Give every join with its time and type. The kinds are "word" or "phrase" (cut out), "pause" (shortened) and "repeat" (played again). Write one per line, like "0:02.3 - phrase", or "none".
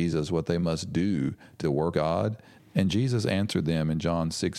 0:01.6 - word
0:01.9 - word